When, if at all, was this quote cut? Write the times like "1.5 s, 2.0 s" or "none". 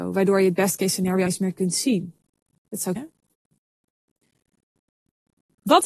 1.3 s, 3.0 s